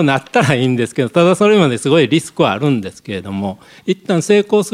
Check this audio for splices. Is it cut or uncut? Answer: uncut